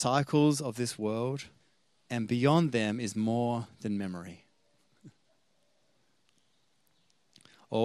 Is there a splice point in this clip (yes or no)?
yes